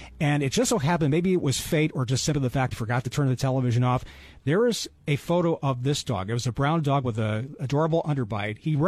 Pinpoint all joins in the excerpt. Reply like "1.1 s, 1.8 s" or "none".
2.7 s

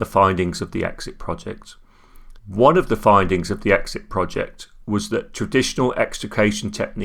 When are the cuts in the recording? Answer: 2.4 s

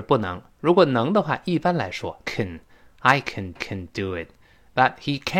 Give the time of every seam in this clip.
2.2 s, 3.6 s

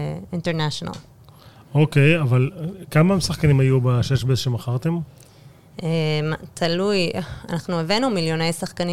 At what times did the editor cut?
none

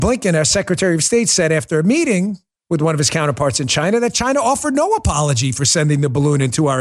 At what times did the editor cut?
2.6 s

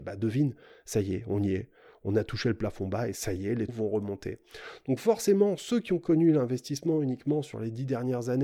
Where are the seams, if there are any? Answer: 3.7 s

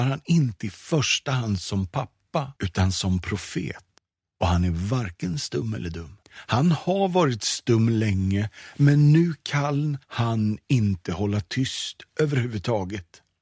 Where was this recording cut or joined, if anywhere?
2.6 s, 4.0 s, 6.2 s, 10.0 s

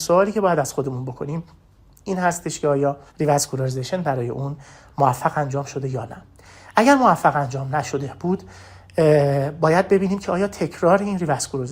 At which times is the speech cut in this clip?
3.1 s

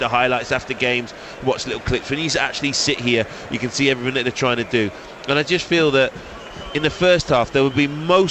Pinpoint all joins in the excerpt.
none

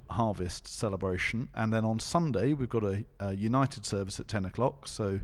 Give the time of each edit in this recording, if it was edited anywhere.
none

